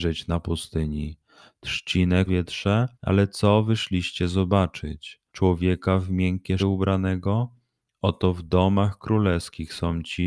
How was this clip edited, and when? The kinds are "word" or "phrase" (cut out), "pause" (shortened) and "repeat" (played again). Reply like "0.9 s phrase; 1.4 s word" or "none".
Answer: 2.3 s phrase; 2.9 s pause; 5.3 s pause; 6.6 s word